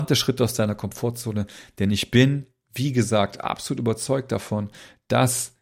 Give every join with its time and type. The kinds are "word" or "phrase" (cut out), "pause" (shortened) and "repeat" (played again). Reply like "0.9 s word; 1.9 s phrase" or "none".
none